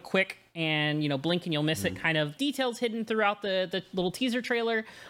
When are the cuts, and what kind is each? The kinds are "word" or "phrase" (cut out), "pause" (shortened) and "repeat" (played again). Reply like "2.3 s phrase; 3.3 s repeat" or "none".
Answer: 2.4 s word